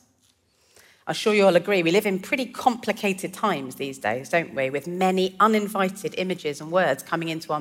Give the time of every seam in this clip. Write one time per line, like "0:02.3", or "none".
none